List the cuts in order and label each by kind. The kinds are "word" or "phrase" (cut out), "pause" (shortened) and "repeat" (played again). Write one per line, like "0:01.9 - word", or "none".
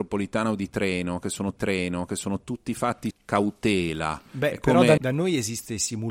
0:01.6 - repeat
0:03.1 - phrase
0:04.3 - pause
0:05.0 - word